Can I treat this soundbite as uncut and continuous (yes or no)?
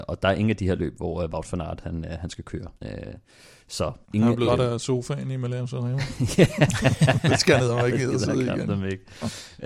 no